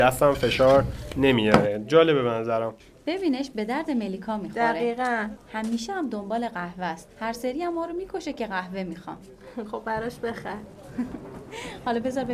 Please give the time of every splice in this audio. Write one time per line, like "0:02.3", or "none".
0:02.8
0:05.4
0:07.1